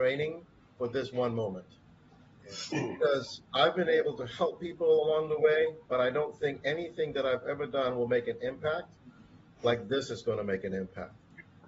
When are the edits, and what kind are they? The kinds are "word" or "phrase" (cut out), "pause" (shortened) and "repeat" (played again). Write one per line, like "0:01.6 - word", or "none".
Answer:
none